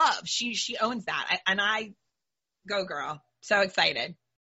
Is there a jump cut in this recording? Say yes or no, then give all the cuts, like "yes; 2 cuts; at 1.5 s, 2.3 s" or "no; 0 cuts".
no; 0 cuts